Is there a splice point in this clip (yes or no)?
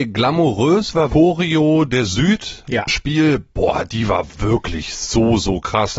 yes